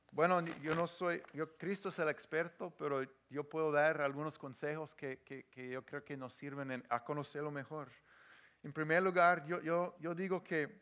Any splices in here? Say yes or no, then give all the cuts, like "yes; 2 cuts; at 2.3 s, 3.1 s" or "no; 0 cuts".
no; 0 cuts